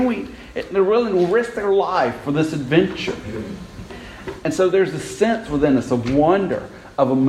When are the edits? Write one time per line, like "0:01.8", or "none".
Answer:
none